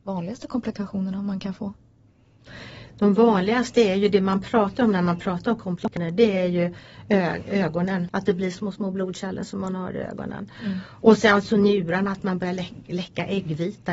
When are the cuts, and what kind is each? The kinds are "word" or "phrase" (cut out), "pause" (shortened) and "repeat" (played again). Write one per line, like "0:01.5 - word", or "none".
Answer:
0:08.5 - phrase

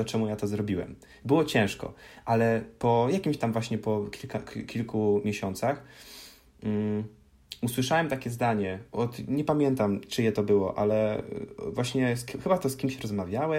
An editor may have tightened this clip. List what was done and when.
none

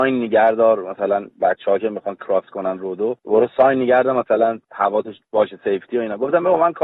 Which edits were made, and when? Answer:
0:01.3 - pause
0:03.2 - pause
0:04.6 - pause

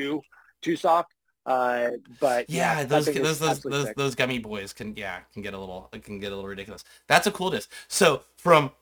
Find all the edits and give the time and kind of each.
none

